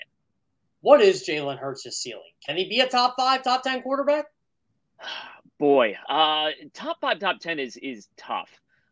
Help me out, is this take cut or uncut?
uncut